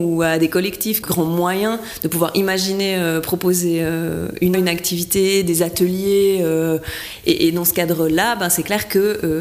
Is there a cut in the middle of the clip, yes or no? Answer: yes